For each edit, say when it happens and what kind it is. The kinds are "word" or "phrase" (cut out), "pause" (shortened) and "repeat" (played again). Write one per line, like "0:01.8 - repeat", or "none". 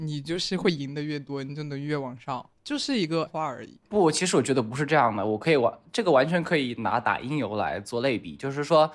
0:02.5 - pause
0:03.3 - word
0:03.8 - pause